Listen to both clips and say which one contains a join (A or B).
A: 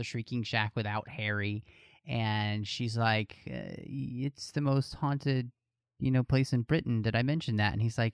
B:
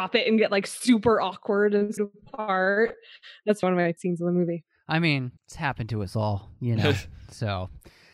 B